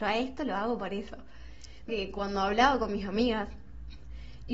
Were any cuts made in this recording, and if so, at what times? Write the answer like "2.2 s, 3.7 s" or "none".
1.9 s